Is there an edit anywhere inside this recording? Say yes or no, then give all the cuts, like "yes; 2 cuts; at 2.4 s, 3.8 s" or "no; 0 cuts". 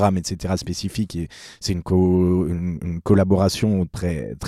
no; 0 cuts